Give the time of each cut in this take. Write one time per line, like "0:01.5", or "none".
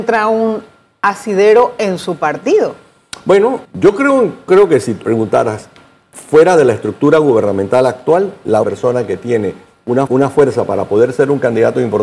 0:03.6
0:04.5
0:05.0
0:08.6
0:10.1